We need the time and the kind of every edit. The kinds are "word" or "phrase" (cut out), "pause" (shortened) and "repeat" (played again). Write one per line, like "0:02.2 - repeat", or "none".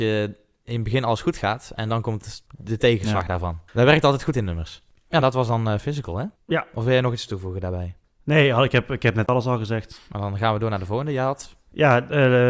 0:02.5 - pause
0:03.7 - pause
0:06.4 - pause